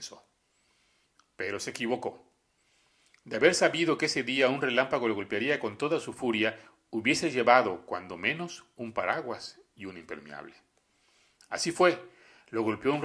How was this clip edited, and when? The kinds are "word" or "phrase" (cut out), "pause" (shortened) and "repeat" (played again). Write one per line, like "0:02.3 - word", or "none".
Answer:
none